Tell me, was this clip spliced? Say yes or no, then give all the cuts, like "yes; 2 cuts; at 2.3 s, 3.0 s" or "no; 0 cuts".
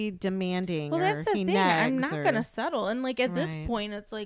no; 0 cuts